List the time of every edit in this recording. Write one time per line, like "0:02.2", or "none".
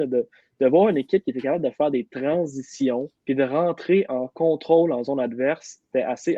0:03.2